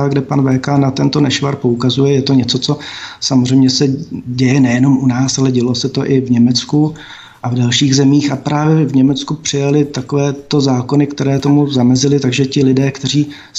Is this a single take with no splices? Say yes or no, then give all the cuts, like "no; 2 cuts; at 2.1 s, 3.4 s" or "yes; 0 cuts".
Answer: yes; 0 cuts